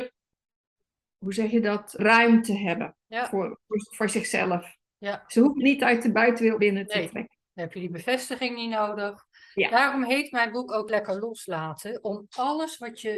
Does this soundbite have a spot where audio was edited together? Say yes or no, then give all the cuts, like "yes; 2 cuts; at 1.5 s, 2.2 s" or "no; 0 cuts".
yes; 3 cuts; at 2.0 s, 5.6 s, 6.6 s